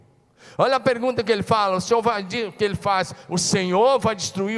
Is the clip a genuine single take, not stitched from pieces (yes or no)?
yes